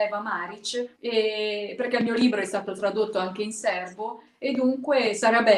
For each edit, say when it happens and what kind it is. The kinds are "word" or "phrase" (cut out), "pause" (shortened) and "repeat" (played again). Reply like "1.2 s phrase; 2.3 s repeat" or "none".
0.9 s pause